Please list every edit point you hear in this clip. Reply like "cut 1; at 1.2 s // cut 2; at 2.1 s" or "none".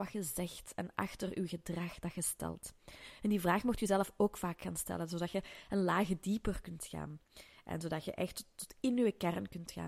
none